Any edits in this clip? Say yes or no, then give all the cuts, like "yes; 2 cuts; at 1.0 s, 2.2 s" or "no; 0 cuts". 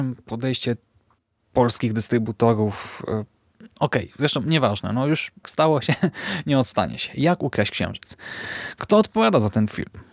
yes; 1 cut; at 5.4 s